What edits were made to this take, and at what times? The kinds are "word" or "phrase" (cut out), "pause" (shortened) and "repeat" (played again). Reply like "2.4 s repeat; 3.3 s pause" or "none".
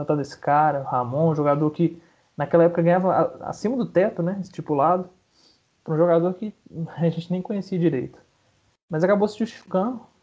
none